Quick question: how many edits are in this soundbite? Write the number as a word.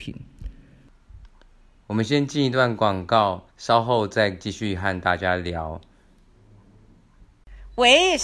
one